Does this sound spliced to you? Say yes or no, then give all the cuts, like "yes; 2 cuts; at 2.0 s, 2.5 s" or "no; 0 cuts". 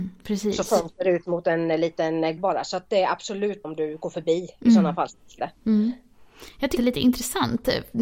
yes; 4 cuts; at 2.4 s, 3.6 s, 5.4 s, 6.8 s